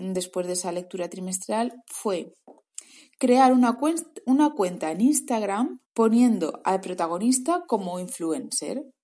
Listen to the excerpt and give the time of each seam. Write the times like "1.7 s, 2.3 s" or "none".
5.9 s

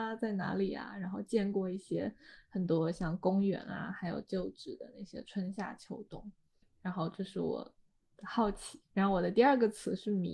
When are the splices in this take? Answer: 6.6 s

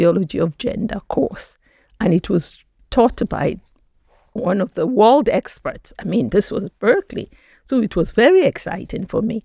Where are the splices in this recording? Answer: none

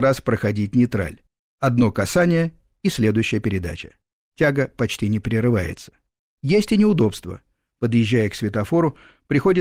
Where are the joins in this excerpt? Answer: none

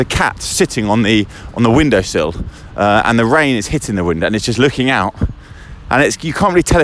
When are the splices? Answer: none

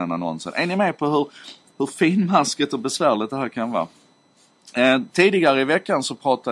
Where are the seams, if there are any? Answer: none

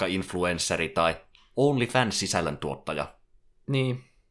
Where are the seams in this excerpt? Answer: none

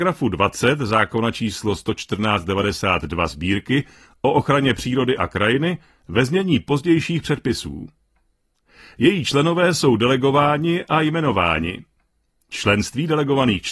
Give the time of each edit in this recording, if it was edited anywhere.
none

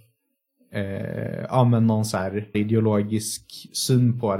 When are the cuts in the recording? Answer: 2.5 s

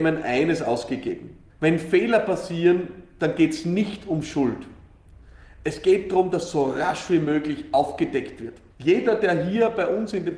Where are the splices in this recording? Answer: 1.5 s, 8.7 s

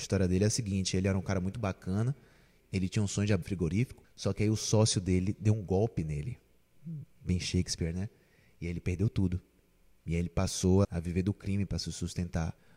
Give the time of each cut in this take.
3.4 s, 10.8 s

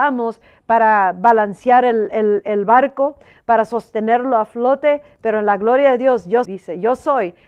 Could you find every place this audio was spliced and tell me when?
6.4 s

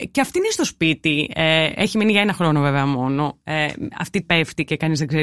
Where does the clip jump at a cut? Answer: 4.2 s

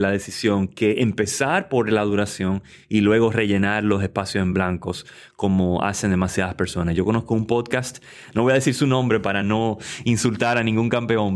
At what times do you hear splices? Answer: none

